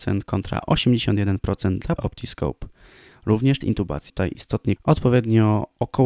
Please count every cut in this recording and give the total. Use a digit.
4